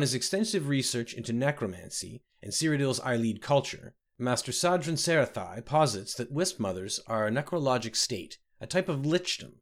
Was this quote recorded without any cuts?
yes; 0 cuts

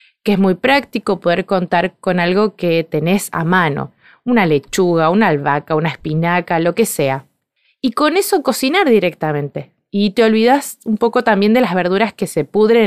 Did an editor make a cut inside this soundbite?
no; 0 cuts

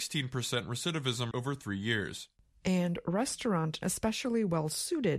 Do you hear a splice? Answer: yes; 3 cuts; at 1.3 s, 2.4 s, 3.8 s

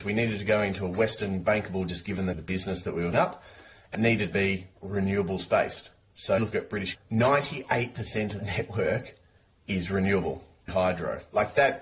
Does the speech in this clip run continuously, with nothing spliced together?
no; 9 cuts; at 1.9 s, 2.3 s, 3.1 s, 3.9 s, 4.3 s, 6.4 s, 6.9 s, 8.4 s, 10.7 s

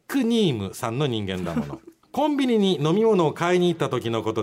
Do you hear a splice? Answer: yes; 1 cut; at 2.0 s

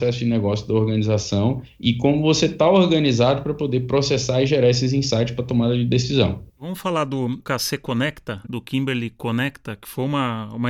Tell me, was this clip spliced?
yes; 2 cuts; at 6.5 s, 8.4 s

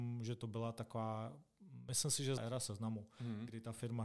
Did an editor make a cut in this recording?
yes; 1 cut; at 2.4 s

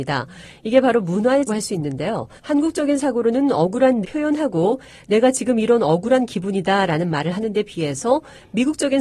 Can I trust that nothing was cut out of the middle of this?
no; 3 cuts; at 1.5 s, 2.4 s, 4.0 s

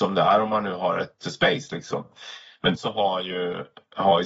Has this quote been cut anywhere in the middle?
yes; 2 cuts; at 1.2 s, 2.7 s

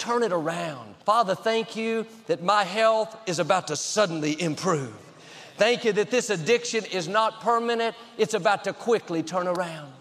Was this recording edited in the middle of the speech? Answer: yes; 1 cut; at 1.0 s

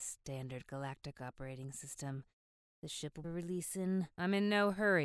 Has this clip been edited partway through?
yes; 1 cut; at 3.2 s

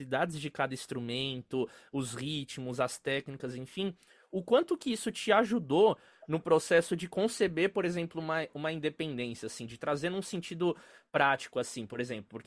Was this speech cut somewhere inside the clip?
no; 0 cuts

